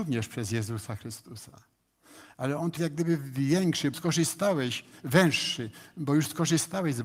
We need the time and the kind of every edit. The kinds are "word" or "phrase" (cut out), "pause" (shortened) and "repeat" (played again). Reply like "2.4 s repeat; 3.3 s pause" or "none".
2.8 s word; 3.9 s word